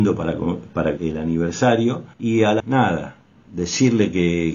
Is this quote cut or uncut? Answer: cut